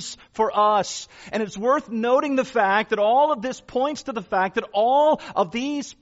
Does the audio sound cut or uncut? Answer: uncut